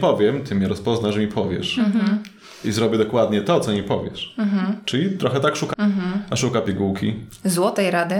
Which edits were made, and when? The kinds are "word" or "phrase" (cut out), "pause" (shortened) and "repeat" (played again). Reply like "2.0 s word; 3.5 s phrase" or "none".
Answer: 5.7 s word